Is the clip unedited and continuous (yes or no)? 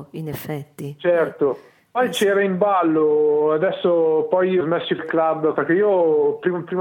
no